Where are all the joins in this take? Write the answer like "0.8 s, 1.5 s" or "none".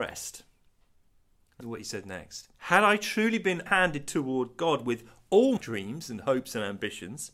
1.6 s, 2.5 s, 3.7 s, 5.6 s

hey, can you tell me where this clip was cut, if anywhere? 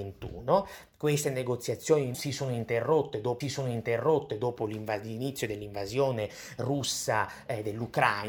2.1 s, 3.4 s

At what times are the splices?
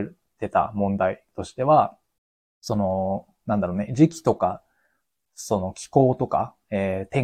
2.2 s

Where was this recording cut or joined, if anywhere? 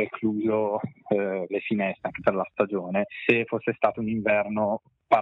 1.5 s

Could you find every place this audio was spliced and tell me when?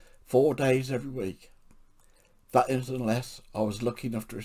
none

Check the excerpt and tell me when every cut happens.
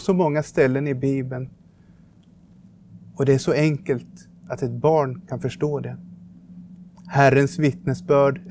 none

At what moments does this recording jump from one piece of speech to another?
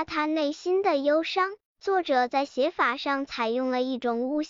1.7 s

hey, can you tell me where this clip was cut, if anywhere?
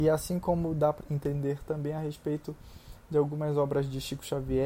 1.0 s

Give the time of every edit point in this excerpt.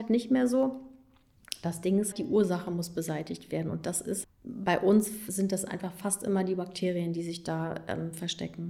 2.1 s, 4.2 s

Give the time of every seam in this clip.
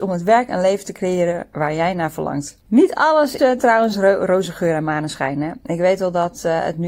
2.6 s, 3.4 s

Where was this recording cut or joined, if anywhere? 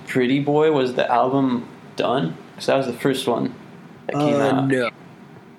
4.0 s

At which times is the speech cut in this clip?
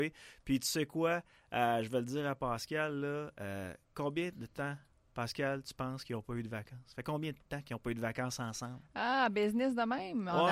none

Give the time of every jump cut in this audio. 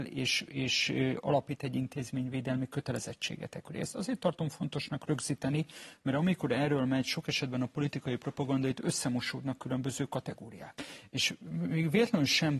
none

